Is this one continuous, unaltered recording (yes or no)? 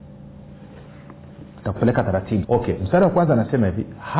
no